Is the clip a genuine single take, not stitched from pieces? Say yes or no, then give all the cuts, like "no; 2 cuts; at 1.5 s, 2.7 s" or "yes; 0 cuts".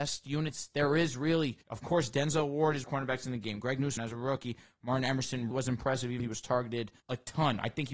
no; 6 cuts; at 1.6 s, 2.8 s, 4.0 s, 5.5 s, 6.2 s, 7.0 s